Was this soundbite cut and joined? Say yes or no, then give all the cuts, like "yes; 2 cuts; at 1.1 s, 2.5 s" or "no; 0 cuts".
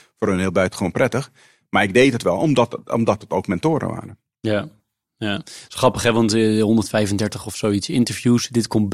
no; 0 cuts